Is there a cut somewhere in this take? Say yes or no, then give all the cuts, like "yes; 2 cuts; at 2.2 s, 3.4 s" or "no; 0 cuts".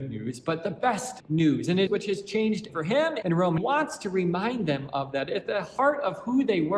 yes; 5 cuts; at 1.2 s, 1.9 s, 2.7 s, 3.2 s, 3.6 s